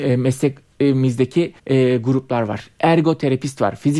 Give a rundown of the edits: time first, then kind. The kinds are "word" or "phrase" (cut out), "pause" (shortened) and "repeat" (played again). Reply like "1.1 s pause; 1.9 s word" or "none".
1.6 s pause